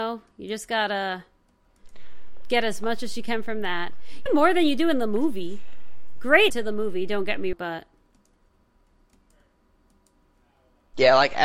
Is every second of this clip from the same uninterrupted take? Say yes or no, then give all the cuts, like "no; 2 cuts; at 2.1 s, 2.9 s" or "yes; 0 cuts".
no; 3 cuts; at 4.3 s, 6.5 s, 7.5 s